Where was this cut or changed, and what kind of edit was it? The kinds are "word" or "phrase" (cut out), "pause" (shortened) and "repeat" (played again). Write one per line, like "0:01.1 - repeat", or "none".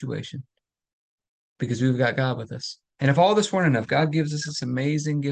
0:02.9 - pause